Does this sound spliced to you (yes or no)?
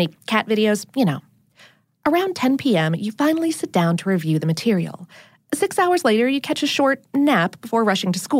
no